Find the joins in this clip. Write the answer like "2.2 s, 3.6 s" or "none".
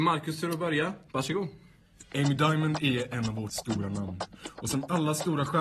1.1 s, 3.5 s